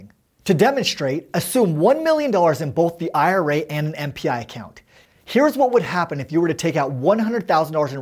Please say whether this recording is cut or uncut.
uncut